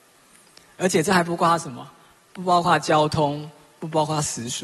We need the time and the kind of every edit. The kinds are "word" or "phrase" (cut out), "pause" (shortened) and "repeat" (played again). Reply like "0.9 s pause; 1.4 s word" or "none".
none